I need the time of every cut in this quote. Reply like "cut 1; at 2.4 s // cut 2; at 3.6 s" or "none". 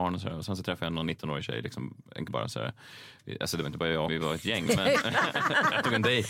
cut 1; at 2.3 s // cut 2; at 4.1 s